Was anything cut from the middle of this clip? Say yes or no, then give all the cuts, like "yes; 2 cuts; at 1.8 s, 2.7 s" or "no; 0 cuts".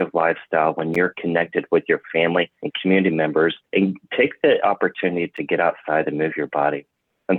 yes; 2 cuts; at 2.5 s, 3.7 s